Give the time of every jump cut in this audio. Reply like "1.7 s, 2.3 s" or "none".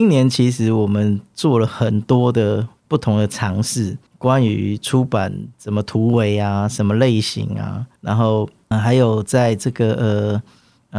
2.8 s, 4.1 s, 8.0 s, 8.7 s